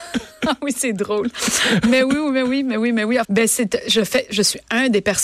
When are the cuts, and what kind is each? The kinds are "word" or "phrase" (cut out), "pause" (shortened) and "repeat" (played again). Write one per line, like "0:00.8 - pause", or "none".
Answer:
0:03.2 - word